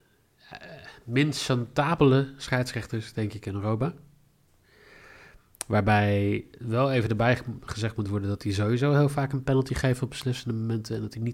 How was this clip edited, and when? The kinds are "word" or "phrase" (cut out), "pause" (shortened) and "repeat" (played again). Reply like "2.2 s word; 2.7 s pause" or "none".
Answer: none